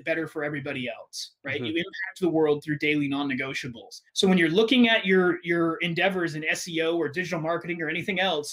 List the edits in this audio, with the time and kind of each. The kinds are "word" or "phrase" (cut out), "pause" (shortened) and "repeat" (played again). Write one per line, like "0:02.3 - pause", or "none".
0:04.1 - pause